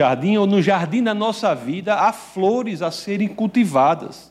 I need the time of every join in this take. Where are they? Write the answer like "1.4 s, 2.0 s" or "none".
none